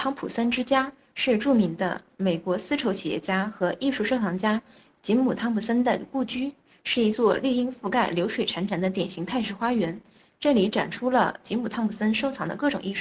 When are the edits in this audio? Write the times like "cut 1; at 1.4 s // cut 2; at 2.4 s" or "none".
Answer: none